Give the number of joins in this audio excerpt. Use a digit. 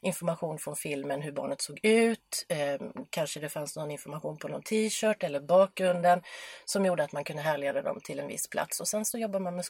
0